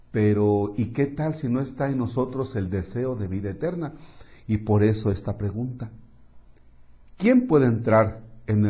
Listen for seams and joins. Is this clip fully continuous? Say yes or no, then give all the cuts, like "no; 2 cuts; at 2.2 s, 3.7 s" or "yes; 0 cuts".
yes; 0 cuts